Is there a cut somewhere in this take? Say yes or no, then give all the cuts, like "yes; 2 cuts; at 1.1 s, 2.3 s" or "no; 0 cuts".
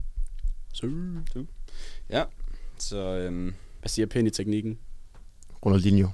no; 0 cuts